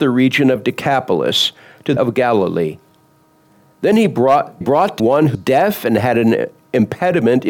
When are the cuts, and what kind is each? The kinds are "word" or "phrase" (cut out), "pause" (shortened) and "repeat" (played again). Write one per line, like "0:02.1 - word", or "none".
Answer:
0:02.0 - word
0:04.6 - word
0:05.0 - word
0:05.3 - word